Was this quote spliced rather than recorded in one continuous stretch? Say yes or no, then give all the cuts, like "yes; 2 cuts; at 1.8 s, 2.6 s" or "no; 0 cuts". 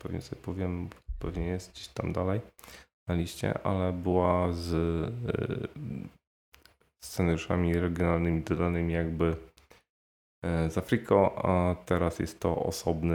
no; 0 cuts